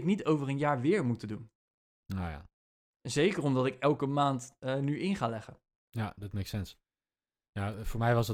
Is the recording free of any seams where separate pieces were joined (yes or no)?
yes